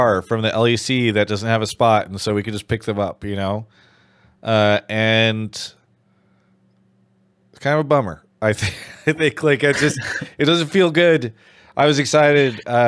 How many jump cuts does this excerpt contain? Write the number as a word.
zero